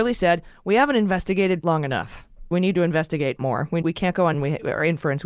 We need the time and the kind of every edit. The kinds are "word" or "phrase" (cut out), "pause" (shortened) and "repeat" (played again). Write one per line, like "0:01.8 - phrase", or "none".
0:01.6 - word
0:02.5 - word
0:03.4 - word
0:03.8 - word
0:04.3 - word

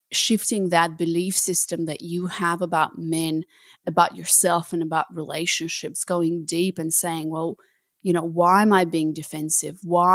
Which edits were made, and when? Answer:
none

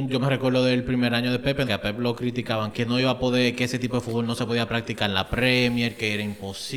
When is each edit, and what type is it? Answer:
0:01.6 - phrase
0:02.7 - word

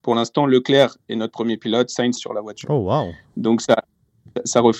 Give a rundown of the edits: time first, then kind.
0:02.2 - phrase

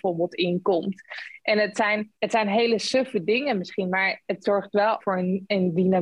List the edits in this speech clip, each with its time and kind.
0:02.2 - pause
0:05.0 - word

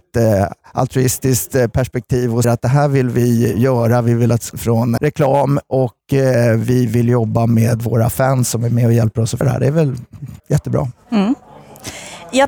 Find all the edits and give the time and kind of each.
0:02.4 - word
0:04.5 - phrase
0:05.0 - word
0:09.4 - word
0:10.4 - pause

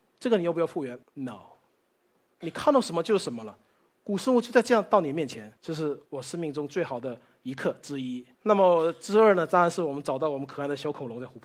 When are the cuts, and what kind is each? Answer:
0:01.0 - pause
0:05.6 - pause
0:06.1 - pause
0:08.3 - pause

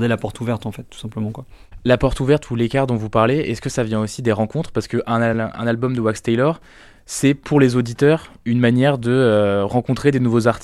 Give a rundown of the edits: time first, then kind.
none

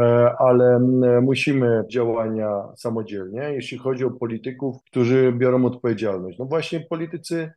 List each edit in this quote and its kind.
0:01.9 - word
0:04.8 - pause

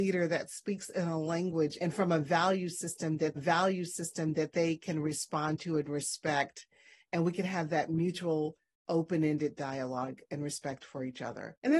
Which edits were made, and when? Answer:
0:03.4 - repeat

